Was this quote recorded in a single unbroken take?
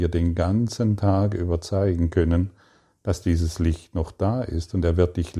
yes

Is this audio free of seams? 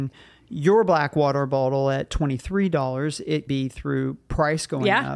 no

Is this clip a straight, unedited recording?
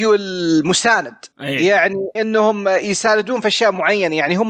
no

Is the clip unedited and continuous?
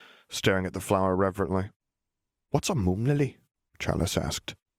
yes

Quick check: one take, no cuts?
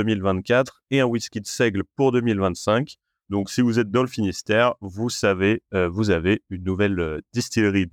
yes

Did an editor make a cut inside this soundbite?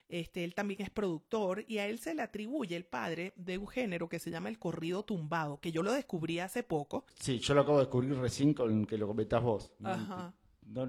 no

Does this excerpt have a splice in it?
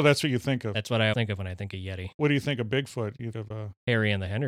yes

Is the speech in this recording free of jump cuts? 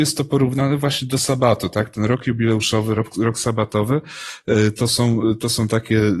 yes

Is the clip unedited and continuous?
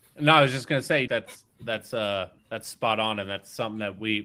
no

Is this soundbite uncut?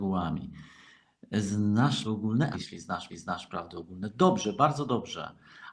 no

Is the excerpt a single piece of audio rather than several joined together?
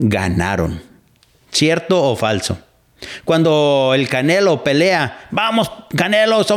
yes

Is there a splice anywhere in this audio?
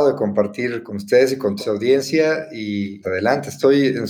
yes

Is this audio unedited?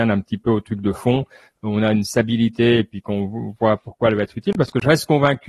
yes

